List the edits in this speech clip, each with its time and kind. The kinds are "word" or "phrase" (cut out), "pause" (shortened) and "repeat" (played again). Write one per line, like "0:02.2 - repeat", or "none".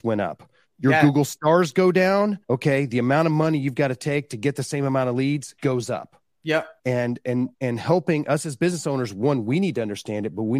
0:02.4 - pause
0:05.6 - pause
0:06.8 - pause
0:07.5 - pause